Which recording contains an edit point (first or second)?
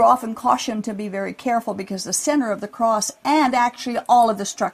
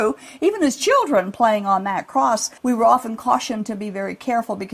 second